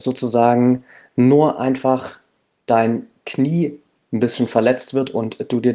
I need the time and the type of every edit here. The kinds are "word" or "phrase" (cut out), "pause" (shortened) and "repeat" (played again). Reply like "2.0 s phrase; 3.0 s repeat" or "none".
none